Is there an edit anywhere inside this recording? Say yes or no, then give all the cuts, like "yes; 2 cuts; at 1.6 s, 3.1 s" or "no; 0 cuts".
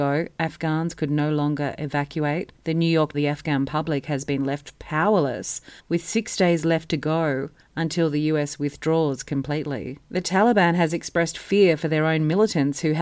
yes; 5 cuts; at 2.6 s, 3.1 s, 5.8 s, 7.6 s, 10.0 s